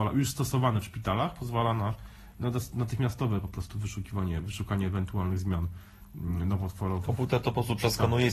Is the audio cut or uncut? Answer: uncut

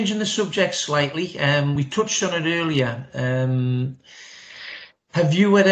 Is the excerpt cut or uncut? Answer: uncut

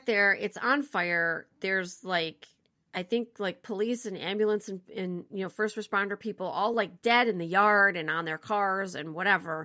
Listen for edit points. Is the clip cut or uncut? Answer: uncut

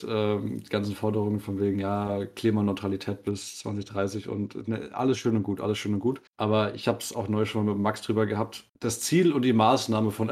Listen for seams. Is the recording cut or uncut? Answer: cut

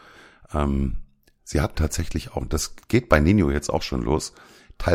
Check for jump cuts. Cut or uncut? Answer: cut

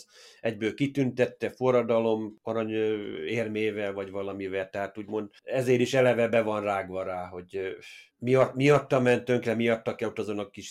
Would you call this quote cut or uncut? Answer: cut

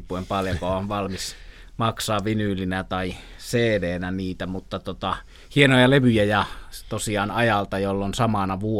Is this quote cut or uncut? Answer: uncut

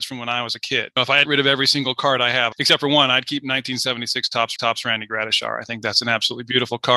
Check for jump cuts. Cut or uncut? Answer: cut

